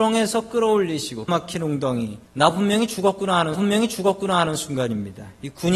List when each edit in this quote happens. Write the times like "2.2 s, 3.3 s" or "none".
1.3 s, 2.3 s, 3.5 s